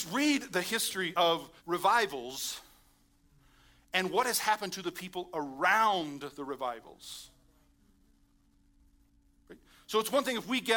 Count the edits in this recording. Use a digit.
1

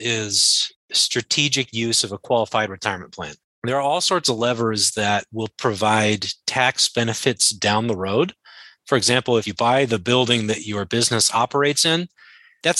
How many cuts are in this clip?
0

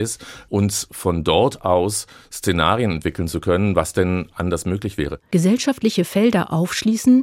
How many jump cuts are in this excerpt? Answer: 0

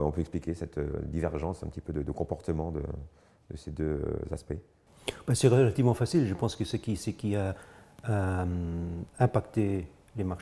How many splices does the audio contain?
0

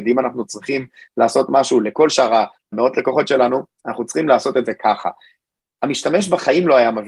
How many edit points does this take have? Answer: 1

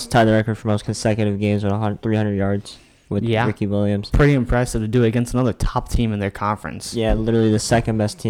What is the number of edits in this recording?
0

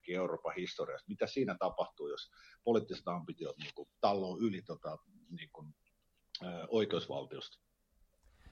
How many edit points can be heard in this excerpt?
0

